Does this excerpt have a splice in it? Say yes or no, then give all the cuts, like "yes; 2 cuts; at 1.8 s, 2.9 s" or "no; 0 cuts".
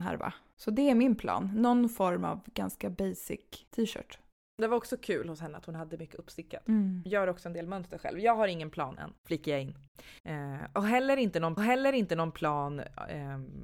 yes; 4 cuts; at 3.7 s, 9.2 s, 10.2 s, 11.6 s